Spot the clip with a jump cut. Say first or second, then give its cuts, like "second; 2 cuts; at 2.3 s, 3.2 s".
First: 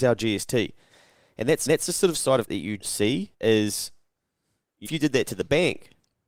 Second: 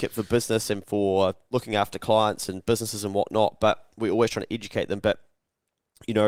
first; 5 cuts; at 1.7 s, 2.5 s, 2.8 s, 3.3 s, 4.9 s